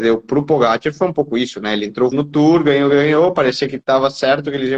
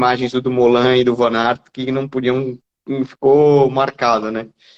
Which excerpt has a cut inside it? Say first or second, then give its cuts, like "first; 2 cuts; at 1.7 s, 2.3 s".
first; 2 cuts; at 2.1 s, 2.9 s